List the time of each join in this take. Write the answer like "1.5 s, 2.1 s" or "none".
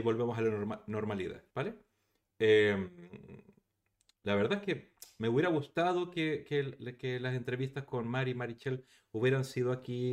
1.5 s